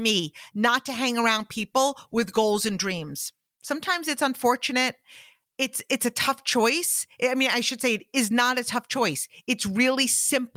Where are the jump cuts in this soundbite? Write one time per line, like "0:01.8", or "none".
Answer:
none